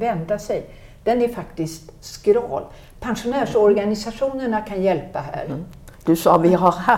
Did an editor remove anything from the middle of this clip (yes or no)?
no